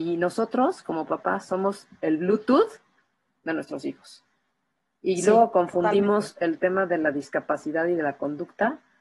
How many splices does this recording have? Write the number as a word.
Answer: zero